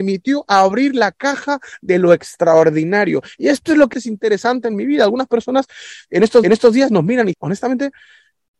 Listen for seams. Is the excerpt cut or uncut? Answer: cut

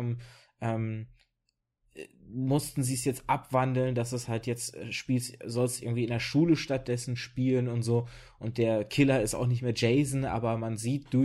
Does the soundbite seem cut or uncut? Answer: uncut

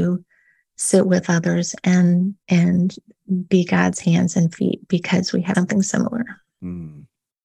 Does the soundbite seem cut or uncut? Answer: cut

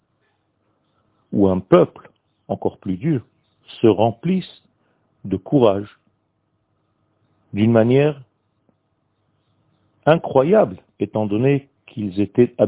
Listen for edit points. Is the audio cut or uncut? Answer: cut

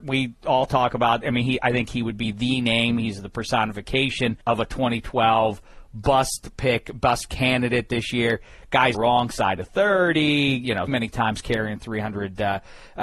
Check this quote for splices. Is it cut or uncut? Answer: cut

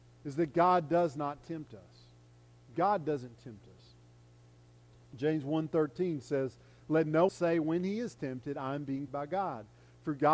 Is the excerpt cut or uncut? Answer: cut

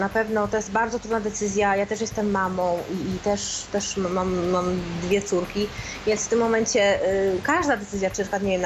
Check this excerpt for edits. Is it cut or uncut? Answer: uncut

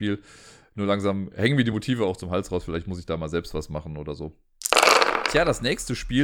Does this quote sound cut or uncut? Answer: uncut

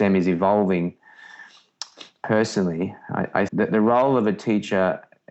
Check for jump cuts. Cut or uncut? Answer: cut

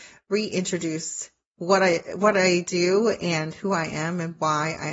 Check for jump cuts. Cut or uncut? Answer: uncut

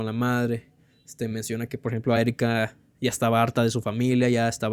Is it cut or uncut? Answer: uncut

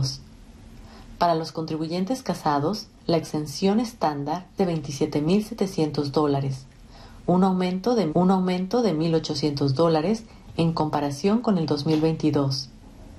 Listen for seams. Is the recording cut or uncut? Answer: cut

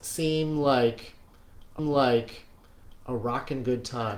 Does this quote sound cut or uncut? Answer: cut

